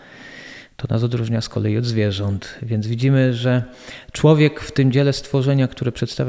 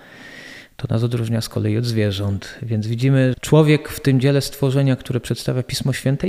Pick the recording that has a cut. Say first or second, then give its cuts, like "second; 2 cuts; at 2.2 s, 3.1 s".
second; 1 cut; at 3.3 s